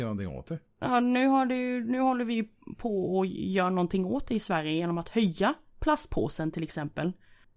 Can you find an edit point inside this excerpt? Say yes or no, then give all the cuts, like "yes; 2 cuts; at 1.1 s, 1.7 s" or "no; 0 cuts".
no; 0 cuts